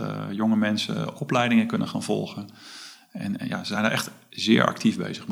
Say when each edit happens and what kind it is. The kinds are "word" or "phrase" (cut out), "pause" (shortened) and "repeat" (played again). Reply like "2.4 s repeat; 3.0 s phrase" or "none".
none